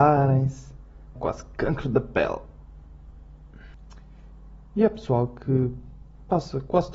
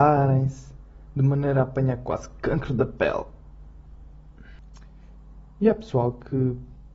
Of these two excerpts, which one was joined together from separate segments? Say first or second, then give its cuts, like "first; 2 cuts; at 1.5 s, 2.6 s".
first; 1 cut; at 1.2 s